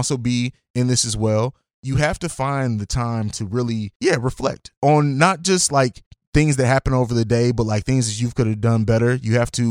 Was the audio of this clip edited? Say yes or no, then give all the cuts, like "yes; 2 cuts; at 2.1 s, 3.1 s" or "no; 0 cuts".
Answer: no; 0 cuts